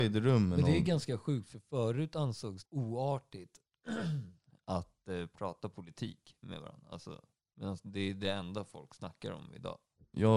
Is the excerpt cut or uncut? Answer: cut